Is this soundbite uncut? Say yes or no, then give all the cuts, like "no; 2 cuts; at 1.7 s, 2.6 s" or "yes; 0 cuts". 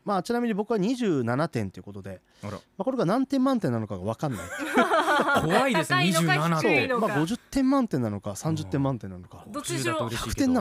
yes; 0 cuts